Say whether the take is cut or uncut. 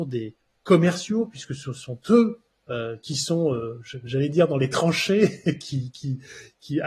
uncut